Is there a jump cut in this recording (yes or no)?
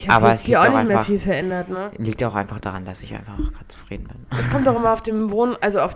no